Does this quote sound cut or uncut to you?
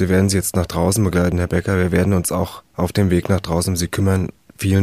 uncut